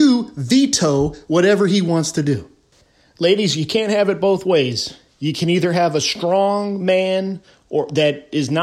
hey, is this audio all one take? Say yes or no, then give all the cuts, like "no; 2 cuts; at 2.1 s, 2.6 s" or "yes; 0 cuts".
yes; 0 cuts